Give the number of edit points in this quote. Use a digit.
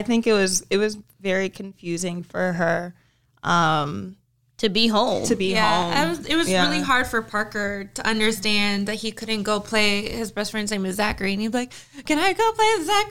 0